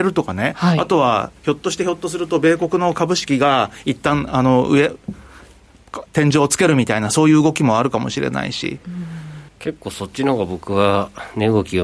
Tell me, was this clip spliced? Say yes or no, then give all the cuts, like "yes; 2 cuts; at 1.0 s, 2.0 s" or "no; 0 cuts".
yes; 2 cuts; at 6.1 s, 9.5 s